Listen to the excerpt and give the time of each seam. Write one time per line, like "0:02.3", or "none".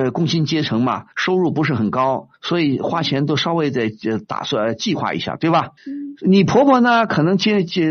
0:01.1
0:02.3
0:05.8